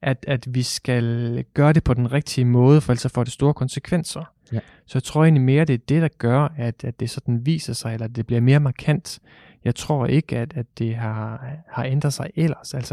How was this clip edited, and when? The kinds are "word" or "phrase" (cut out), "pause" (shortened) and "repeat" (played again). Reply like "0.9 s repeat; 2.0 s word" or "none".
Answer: none

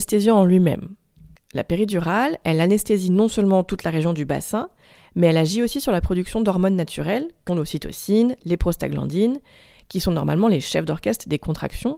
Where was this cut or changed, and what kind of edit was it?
7.5 s word

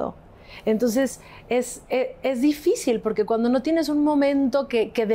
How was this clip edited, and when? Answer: none

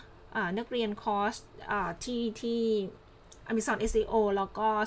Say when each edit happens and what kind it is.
none

